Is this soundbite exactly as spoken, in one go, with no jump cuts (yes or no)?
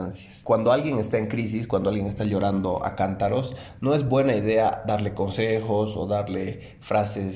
yes